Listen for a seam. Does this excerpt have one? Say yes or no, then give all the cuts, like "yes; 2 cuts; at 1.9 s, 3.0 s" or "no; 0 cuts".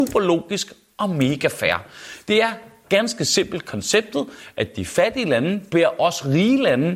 no; 0 cuts